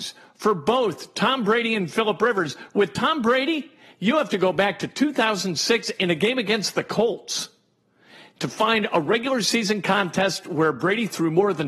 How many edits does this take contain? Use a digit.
0